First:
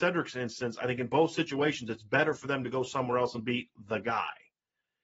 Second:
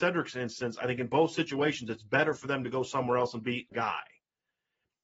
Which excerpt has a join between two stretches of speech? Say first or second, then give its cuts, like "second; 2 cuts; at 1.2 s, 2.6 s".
second; 1 cut; at 3.7 s